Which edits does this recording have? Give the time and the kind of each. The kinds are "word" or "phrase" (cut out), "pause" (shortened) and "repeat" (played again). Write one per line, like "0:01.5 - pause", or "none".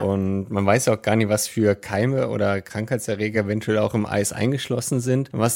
none